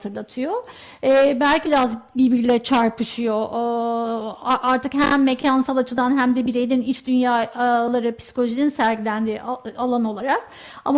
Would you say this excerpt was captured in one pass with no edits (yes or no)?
no